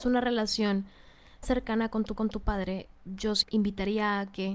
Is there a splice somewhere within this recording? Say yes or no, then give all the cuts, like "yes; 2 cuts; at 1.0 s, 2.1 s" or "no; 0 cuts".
yes; 3 cuts; at 1.4 s, 2.2 s, 3.4 s